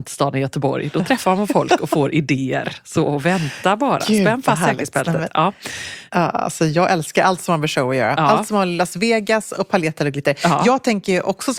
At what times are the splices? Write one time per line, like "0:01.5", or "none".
none